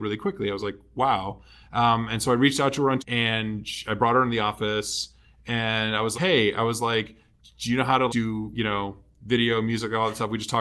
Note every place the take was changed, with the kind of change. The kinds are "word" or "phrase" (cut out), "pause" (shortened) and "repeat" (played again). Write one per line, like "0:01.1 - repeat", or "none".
0:03.0 - word
0:06.1 - word
0:08.1 - word